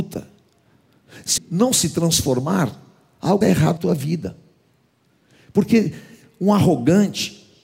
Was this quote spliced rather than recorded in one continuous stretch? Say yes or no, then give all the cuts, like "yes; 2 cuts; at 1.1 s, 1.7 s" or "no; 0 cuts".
yes; 3 cuts; at 1.4 s, 3.4 s, 3.8 s